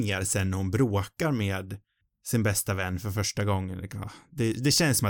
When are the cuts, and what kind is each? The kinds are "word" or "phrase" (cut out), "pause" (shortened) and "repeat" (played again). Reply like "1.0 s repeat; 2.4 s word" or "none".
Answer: none